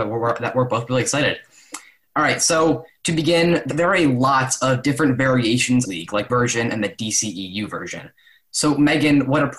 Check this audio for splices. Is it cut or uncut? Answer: cut